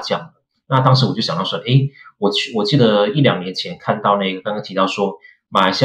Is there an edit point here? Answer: no; 0 cuts

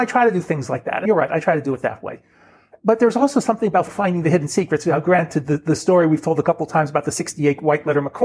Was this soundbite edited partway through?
no; 0 cuts

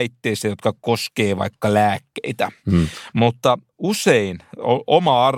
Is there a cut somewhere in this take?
no; 0 cuts

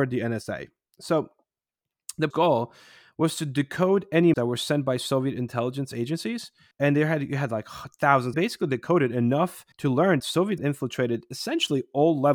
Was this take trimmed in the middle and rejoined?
yes; 7 cuts; at 2.3 s, 4.3 s, 6.7 s, 8.3 s, 9.7 s, 10.2 s, 10.6 s

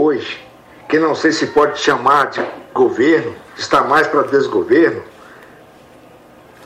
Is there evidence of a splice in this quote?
yes; 1 cut; at 3.5 s

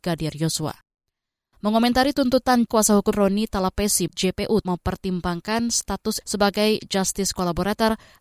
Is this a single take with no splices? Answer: no; 5 cuts; at 2.7 s, 3.1 s, 4.1 s, 4.6 s, 6.2 s

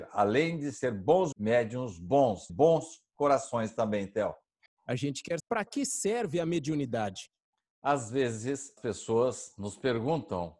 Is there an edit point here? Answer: yes; 4 cuts; at 1.3 s, 2.5 s, 5.4 s, 8.8 s

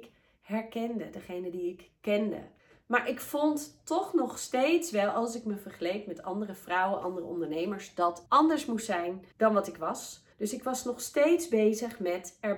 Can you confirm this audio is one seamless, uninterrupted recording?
no; 4 cuts; at 2.6 s, 8.3 s, 9.3 s, 10.3 s

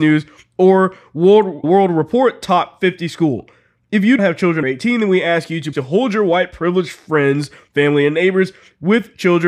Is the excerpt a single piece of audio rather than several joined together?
no; 4 cuts; at 1.6 s, 4.2 s, 4.6 s, 5.7 s

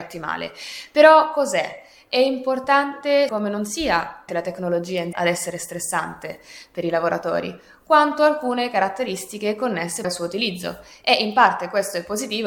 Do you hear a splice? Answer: yes; 4 cuts; at 3.3 s, 4.3 s, 5.1 s, 10.0 s

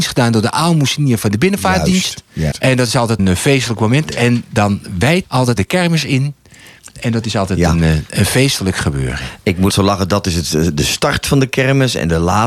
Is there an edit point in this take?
yes; 5 cuts; at 2.5 s, 3.2 s, 5.2 s, 5.6 s, 9.7 s

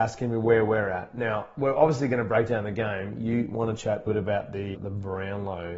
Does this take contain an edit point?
yes; 2 cuts; at 4.1 s, 4.7 s

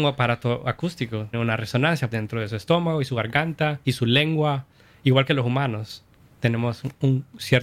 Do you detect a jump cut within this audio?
yes; 2 cuts; at 1.3 s, 2.1 s

